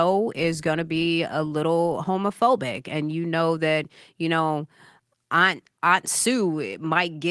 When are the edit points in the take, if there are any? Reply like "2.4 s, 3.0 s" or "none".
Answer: none